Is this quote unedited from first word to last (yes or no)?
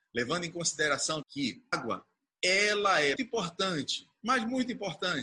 no